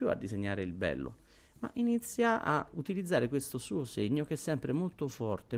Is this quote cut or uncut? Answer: uncut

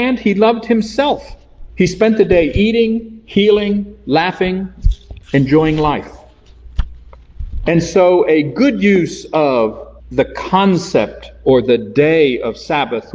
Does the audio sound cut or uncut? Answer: cut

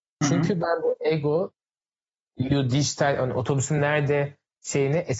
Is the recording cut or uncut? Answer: uncut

